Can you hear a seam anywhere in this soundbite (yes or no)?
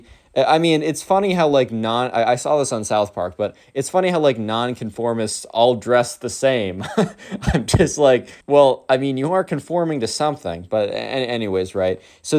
yes